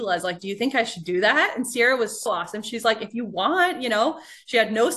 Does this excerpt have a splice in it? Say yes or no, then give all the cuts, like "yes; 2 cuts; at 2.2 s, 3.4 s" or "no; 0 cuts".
yes; 1 cut; at 2.3 s